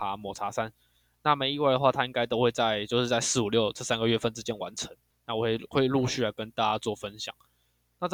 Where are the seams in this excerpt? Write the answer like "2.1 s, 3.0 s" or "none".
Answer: 5.1 s